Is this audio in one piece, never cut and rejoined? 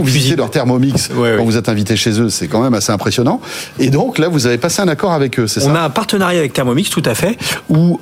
yes; 0 cuts

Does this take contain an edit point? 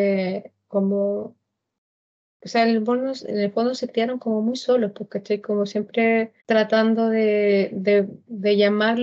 yes; 1 cut; at 6.4 s

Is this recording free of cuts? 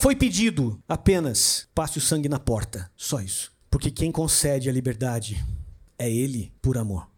yes; 0 cuts

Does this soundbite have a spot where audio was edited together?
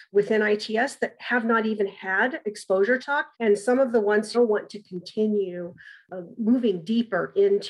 yes; 4 cuts; at 2.4 s, 3.0 s, 3.3 s, 4.3 s

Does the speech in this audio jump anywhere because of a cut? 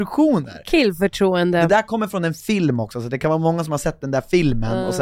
no; 0 cuts

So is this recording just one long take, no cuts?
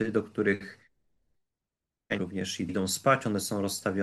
no; 2 cuts; at 2.2 s, 2.7 s

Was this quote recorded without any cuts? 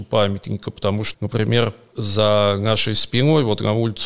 no; 1 cut; at 1.1 s

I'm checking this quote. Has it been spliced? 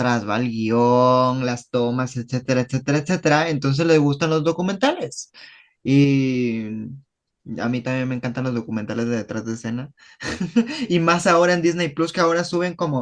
no; 0 cuts

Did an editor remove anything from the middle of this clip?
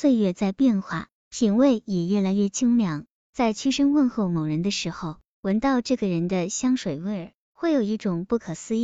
no; 0 cuts

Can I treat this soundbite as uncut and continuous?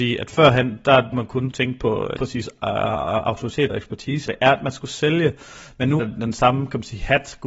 no; 6 cuts; at 1.1 s, 1.5 s, 2.2 s, 3.7 s, 4.3 s, 6.0 s

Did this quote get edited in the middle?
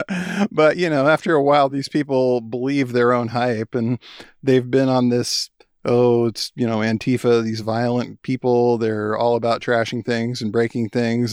no; 0 cuts

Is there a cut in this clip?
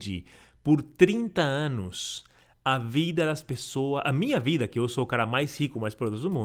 no; 0 cuts

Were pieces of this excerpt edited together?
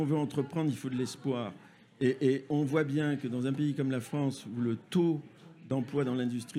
no; 0 cuts

